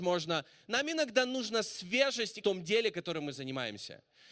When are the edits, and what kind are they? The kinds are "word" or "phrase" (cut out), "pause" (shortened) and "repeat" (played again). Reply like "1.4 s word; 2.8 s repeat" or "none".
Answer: 2.4 s phrase